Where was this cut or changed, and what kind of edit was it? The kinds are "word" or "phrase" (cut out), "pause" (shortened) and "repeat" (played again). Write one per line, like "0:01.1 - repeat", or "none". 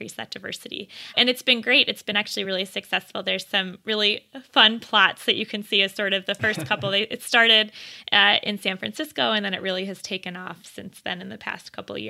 none